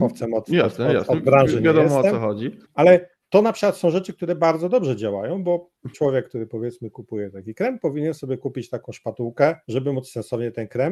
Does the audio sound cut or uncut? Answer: cut